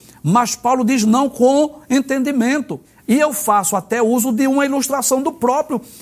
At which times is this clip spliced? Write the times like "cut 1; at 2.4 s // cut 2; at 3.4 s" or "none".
cut 1; at 2.8 s